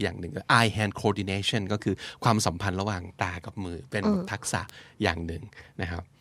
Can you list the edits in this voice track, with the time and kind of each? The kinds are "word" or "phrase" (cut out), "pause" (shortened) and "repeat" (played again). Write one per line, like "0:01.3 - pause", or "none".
none